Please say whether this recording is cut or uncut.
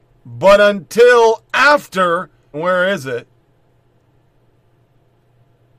cut